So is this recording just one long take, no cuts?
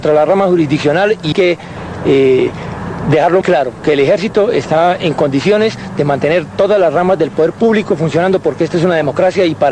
no; 2 cuts; at 1.3 s, 3.4 s

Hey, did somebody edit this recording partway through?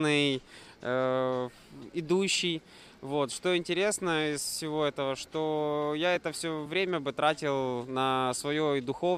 no; 0 cuts

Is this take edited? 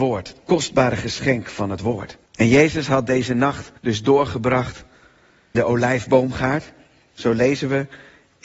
yes; 3 cuts; at 2.3 s, 3.8 s, 5.5 s

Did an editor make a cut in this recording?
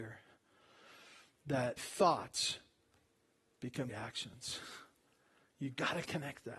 yes; 2 cuts; at 1.8 s, 3.9 s

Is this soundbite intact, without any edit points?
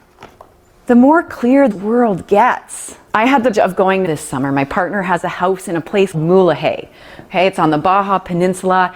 no; 5 cuts; at 1.7 s, 3.1 s, 3.5 s, 4.0 s, 6.1 s

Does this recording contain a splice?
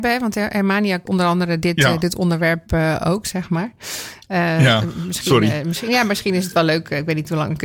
yes; 1 cut; at 1.0 s

